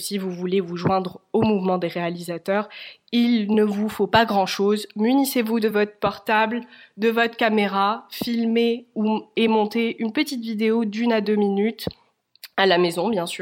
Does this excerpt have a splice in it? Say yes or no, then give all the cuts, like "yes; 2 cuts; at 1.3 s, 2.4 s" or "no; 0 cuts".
no; 0 cuts